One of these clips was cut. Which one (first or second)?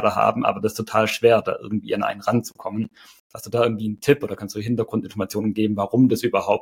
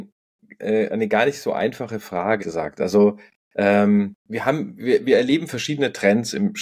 second